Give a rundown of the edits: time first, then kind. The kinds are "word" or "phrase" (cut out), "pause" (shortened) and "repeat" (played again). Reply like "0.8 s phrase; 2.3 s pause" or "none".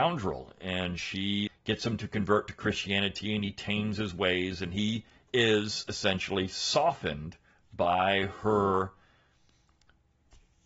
1.5 s word